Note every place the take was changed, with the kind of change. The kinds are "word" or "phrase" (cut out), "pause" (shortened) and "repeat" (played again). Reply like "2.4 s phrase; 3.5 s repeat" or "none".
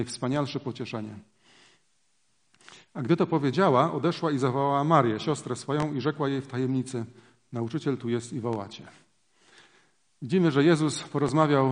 none